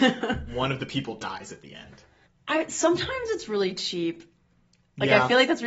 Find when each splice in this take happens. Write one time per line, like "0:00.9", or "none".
0:02.3